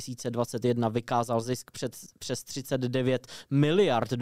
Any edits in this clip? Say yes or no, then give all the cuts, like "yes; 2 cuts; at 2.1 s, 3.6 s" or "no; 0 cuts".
no; 0 cuts